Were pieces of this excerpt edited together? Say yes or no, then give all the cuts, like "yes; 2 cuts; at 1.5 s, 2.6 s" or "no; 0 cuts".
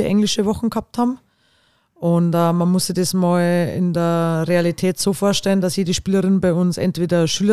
no; 0 cuts